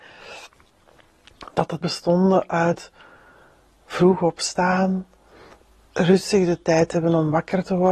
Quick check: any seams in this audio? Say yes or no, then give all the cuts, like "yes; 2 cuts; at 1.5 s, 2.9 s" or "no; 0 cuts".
yes; 1 cut; at 1.8 s